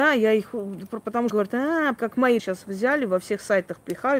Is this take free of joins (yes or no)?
no